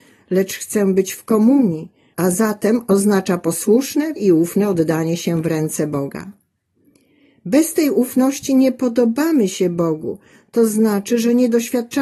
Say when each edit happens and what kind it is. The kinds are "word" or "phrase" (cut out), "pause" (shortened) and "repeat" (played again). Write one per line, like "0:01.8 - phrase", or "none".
0:04.2 - word